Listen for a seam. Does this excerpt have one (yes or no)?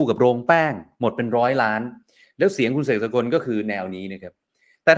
no